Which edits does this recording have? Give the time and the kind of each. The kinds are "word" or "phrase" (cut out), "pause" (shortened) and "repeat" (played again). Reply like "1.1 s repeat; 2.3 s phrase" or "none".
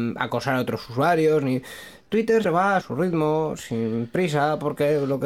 2.4 s word; 2.8 s phrase